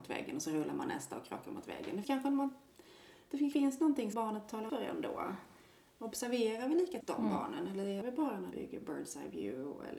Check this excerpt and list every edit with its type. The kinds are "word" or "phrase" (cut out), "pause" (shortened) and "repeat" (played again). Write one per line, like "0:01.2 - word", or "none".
0:02.0 - word
0:03.5 - word
0:04.1 - word
0:04.7 - word
0:07.0 - word
0:08.0 - word
0:08.5 - word